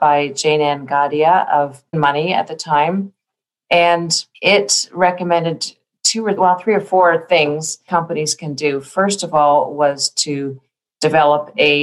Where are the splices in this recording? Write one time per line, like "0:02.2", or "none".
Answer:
0:01.9
0:04.3
0:06.4
0:07.9